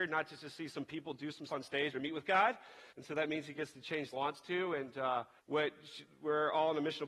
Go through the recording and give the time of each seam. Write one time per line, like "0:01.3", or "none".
0:01.5
0:01.9
0:02.9
0:04.1
0:05.4